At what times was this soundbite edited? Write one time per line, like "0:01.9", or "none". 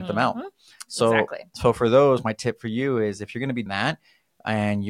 0:03.7